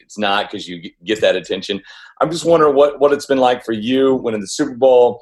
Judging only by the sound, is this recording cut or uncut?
uncut